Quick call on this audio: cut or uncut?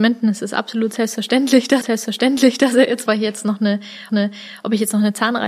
cut